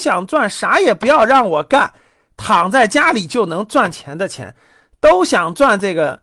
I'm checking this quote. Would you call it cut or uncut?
uncut